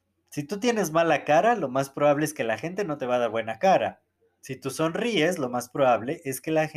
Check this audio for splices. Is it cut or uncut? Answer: uncut